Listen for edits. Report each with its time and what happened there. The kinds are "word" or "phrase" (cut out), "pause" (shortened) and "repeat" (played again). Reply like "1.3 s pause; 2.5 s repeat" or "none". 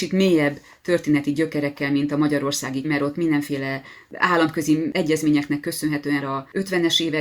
2.8 s word; 6.2 s word